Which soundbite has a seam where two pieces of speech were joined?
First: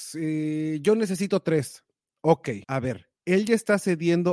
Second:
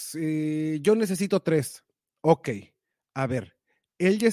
first; 2 cuts; at 2.6 s, 3.2 s

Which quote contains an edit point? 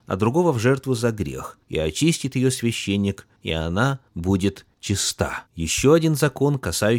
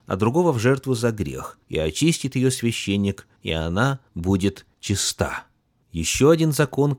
first; 1 cut; at 5.5 s

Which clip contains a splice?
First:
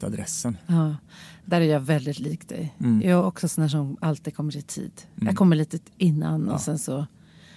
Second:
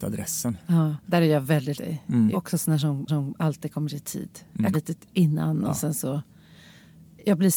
second; 5 cuts; at 1.0 s, 1.7 s, 2.3 s, 3.1 s, 4.7 s

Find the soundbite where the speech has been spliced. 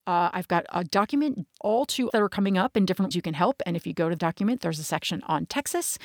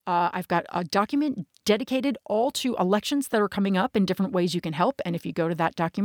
first; 4 cuts; at 1.6 s, 2.1 s, 3.1 s, 4.2 s

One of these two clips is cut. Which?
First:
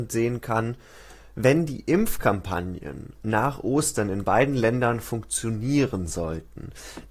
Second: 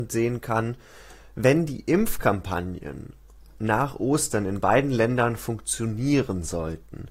first; 1 cut; at 3.2 s

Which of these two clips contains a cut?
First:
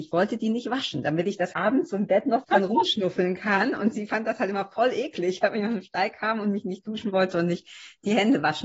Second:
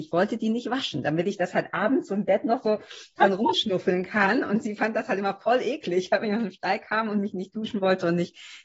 first; 2 cuts; at 1.5 s, 2.4 s

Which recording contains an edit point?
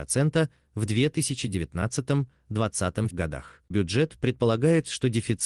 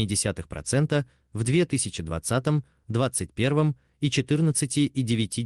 first; 2 cuts; at 3.1 s, 3.7 s

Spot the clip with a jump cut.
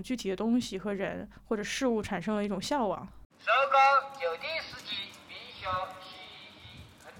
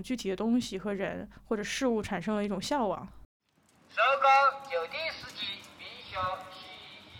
first; 1 cut; at 3.3 s

